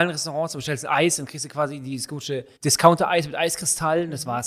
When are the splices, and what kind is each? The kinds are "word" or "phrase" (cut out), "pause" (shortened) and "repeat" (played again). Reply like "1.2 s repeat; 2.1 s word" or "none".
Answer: 2.6 s pause